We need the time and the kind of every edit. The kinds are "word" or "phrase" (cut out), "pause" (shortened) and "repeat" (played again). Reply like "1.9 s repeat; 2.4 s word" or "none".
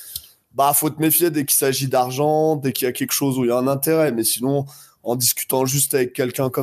none